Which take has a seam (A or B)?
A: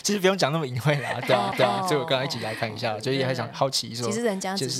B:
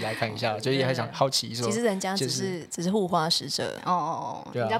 A